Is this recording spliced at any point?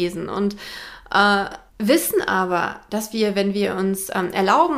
yes; 1 cut; at 1.7 s

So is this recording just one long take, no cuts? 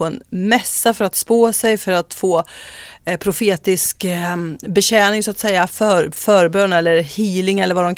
yes; 0 cuts

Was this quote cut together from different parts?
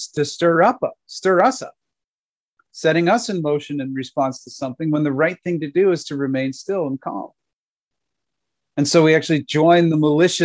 no; 0 cuts

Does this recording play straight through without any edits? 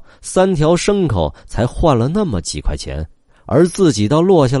yes; 0 cuts

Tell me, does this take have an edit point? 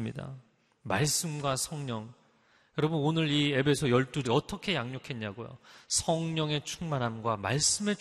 yes; 1 cut; at 4.2 s

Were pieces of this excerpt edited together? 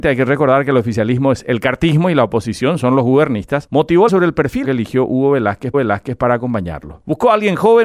yes; 3 cuts; at 4.1 s, 4.6 s, 5.7 s

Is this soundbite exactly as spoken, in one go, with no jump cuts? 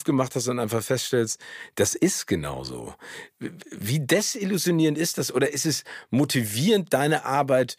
yes; 0 cuts

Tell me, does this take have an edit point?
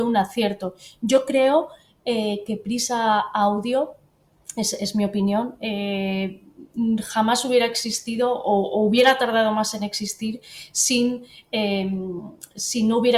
no; 0 cuts

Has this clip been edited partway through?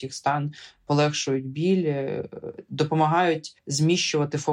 yes; 1 cut; at 3.6 s

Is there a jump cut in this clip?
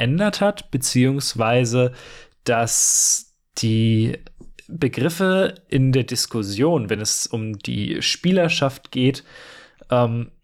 no; 0 cuts

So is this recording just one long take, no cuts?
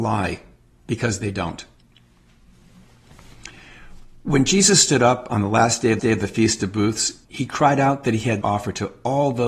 no; 3 cuts; at 6.0 s, 7.2 s, 8.4 s

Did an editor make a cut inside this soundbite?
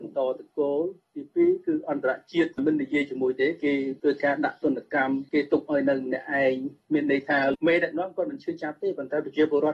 no; 0 cuts

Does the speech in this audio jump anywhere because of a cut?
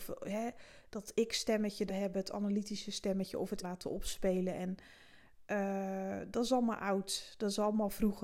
yes; 2 cuts; at 1.9 s, 3.6 s

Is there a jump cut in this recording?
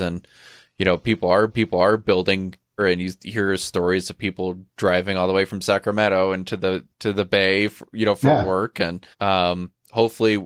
yes; 4 cuts; at 1.5 s, 2.8 s, 4.7 s, 9.1 s

